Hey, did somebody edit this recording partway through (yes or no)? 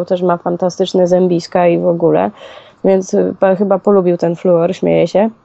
no